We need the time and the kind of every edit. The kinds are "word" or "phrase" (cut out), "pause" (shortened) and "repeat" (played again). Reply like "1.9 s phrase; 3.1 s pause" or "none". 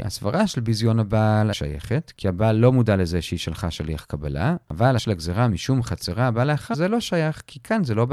1.5 s word; 5.0 s word; 6.7 s word